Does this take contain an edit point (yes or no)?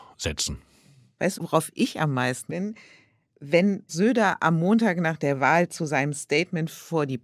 yes